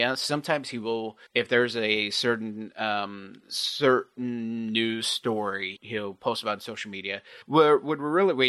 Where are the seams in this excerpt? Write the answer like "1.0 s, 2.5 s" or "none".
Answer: 1.3 s, 5.8 s, 7.4 s